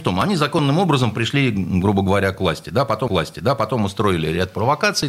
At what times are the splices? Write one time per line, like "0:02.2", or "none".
0:03.1